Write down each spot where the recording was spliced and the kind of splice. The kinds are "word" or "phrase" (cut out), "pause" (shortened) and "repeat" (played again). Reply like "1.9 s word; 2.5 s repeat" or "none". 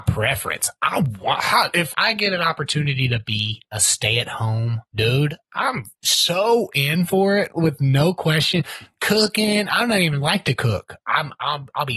1.9 s word; 4.9 s pause